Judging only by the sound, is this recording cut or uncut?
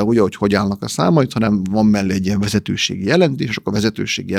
uncut